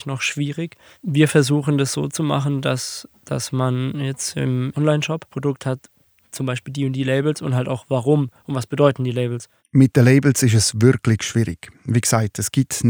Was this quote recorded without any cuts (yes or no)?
no